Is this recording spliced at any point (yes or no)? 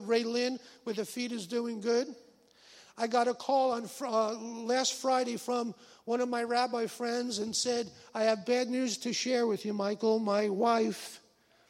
no